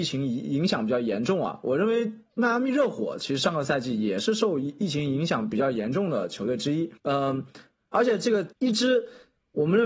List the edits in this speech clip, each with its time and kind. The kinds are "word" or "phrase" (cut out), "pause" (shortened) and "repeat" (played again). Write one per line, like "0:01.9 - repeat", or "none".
0:07.0 - pause
0:08.5 - pause